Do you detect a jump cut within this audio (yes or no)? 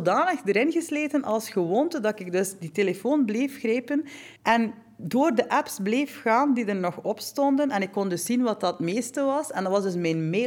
yes